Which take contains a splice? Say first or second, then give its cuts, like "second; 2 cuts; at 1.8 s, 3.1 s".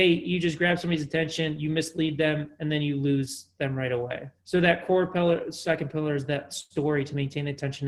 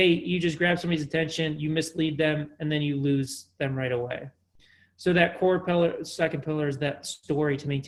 first; 1 cut; at 4.4 s